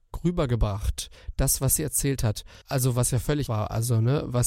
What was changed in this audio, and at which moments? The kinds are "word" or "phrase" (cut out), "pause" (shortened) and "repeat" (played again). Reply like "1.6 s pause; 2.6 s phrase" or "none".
2.6 s pause; 3.5 s word